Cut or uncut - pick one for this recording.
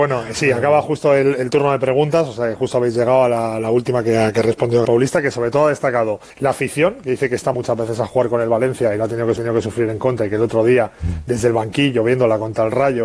cut